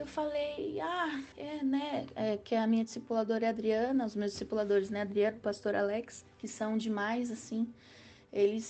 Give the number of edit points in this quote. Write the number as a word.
one